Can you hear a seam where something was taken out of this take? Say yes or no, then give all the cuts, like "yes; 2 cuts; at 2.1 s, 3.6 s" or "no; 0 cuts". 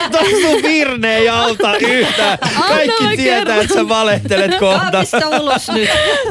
no; 0 cuts